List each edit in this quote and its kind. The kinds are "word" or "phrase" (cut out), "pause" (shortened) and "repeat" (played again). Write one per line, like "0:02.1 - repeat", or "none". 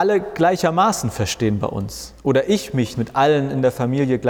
0:02.9 - word